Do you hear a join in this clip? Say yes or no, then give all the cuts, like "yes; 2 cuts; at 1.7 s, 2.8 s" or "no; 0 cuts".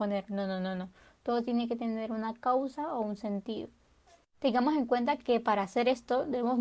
no; 0 cuts